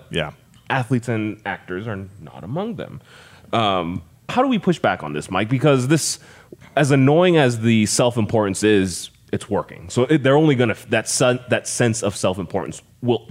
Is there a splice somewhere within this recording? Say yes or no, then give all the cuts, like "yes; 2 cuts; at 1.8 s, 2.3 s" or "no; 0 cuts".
yes; 1 cut; at 4.3 s